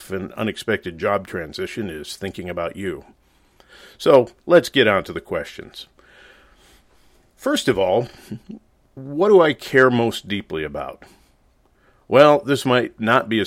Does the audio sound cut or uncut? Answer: uncut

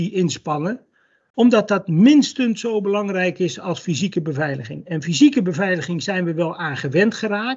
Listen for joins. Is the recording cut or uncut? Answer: uncut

